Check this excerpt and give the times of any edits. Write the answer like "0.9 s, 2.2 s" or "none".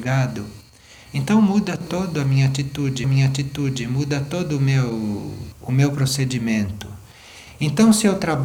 3.0 s